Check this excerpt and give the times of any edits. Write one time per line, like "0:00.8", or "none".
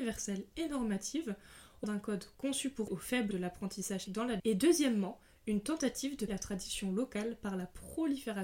0:01.8
0:02.3
0:02.9
0:03.3
0:04.1
0:04.4
0:06.3

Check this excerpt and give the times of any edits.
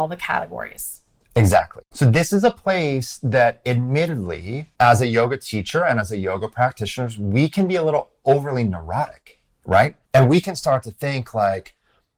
0:01.9
0:04.7
0:10.0

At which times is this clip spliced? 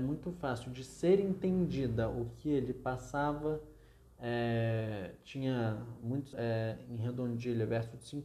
0:06.3

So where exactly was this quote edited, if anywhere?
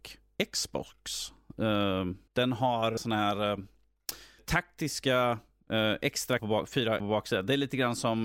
0:02.3
0:03.0
0:04.4
0:06.4
0:07.0

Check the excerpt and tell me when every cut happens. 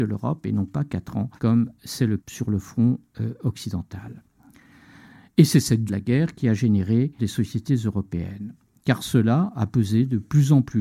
0:01.4
0:02.2
0:05.9
0:07.2

